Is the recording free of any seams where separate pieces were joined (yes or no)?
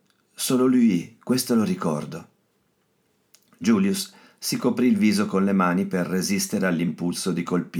yes